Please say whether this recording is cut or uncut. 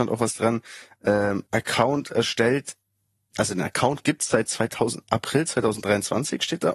cut